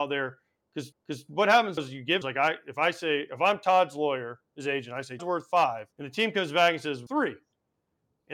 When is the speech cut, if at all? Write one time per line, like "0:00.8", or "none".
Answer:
0:00.9
0:01.8
0:02.2
0:05.2
0:05.9
0:07.1